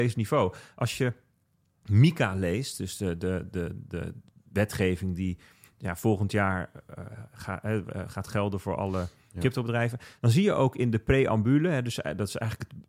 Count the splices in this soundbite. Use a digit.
0